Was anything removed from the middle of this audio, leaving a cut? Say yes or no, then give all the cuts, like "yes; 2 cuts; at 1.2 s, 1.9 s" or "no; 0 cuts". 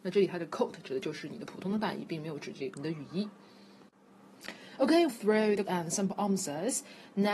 yes; 3 cuts; at 2.7 s, 5.1 s, 5.7 s